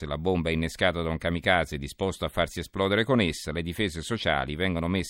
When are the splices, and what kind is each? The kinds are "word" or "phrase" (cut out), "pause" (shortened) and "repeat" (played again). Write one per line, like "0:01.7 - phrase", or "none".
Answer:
none